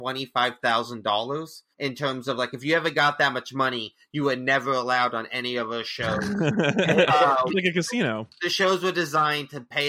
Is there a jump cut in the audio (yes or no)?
yes